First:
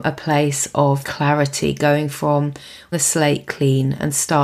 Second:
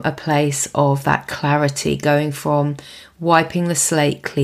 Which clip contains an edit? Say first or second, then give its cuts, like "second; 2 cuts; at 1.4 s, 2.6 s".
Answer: first; 2 cuts; at 1.0 s, 2.9 s